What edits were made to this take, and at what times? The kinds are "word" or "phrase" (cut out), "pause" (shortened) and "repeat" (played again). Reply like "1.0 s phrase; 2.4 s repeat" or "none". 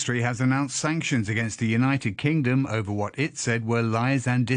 none